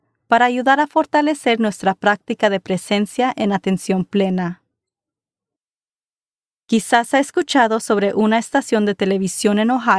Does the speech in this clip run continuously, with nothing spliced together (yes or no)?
yes